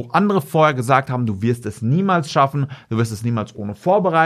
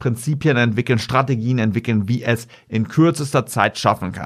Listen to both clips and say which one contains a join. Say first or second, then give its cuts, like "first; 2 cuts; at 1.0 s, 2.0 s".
second; 1 cut; at 2.7 s